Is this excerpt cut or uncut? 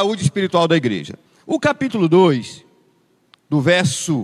cut